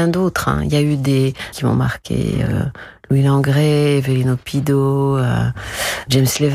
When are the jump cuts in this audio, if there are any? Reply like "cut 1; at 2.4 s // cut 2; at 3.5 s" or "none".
cut 1; at 1.5 s